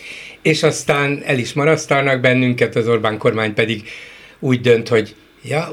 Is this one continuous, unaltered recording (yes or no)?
yes